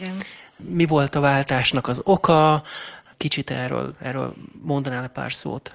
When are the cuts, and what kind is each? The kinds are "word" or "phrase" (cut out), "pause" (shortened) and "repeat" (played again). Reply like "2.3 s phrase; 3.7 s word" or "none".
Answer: none